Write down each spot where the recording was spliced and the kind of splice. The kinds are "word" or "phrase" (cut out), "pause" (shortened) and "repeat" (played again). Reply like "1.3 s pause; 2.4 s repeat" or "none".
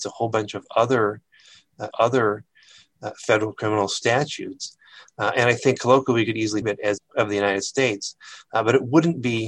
1.9 s repeat; 6.6 s word; 7.0 s phrase